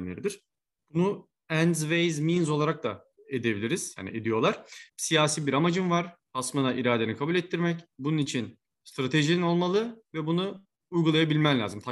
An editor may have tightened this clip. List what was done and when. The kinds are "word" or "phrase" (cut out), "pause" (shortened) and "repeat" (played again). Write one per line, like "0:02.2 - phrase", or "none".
0:03.1 - word
0:04.9 - pause
0:07.9 - pause